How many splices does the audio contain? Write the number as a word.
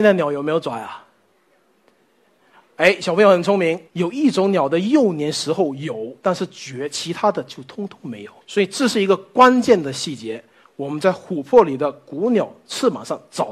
two